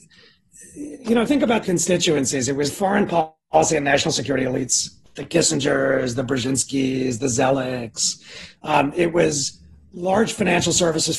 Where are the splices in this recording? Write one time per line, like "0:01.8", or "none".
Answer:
0:01.3
0:01.6
0:02.7